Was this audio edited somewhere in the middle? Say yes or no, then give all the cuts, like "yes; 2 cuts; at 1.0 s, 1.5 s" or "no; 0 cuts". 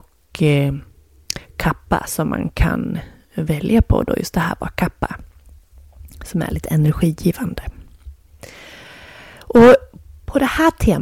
no; 0 cuts